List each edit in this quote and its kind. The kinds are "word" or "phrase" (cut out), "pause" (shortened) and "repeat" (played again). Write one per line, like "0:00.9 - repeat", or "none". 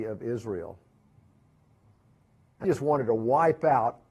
0:02.6 - word